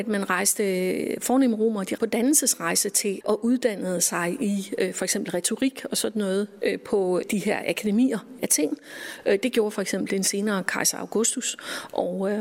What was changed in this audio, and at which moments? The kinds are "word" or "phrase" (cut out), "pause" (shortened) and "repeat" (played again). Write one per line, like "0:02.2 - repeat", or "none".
0:02.0 - word
0:03.2 - word
0:08.4 - word